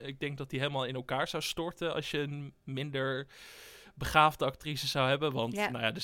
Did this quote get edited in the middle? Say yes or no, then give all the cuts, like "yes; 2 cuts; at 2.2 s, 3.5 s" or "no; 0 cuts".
no; 0 cuts